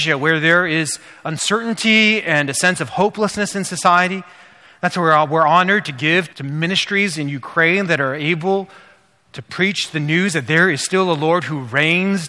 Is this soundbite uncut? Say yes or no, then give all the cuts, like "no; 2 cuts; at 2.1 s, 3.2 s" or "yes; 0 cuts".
no; 1 cut; at 6.3 s